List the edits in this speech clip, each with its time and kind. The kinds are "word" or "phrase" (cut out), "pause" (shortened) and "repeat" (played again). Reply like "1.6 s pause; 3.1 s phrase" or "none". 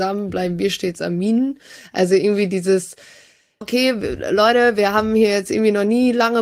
3.6 s word